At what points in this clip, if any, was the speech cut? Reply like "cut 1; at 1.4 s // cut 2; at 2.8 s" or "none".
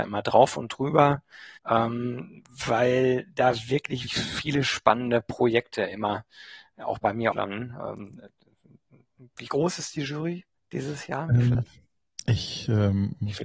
cut 1; at 1.6 s // cut 2; at 4.1 s // cut 3; at 7.3 s // cut 4; at 10.6 s // cut 5; at 11.5 s